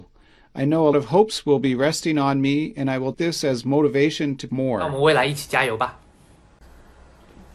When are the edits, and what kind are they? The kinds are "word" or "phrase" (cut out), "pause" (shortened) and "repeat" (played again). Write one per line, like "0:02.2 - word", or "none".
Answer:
0:00.9 - word
0:03.1 - word
0:04.5 - phrase